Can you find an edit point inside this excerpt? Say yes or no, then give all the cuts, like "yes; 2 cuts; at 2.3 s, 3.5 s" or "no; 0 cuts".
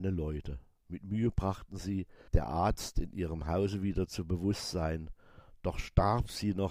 yes; 1 cut; at 2.3 s